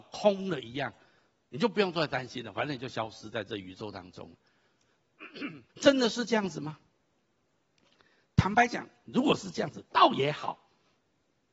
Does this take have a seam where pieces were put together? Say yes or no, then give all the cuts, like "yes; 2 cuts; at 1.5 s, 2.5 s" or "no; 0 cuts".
yes; 1 cut; at 5.7 s